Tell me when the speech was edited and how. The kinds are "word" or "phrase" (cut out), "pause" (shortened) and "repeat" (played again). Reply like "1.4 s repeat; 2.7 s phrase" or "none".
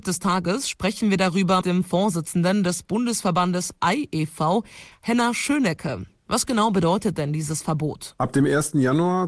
1.6 s word